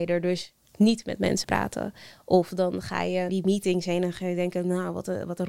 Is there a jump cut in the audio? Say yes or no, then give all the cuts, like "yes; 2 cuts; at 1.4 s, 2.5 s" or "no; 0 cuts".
yes; 2 cuts; at 1.4 s, 3.3 s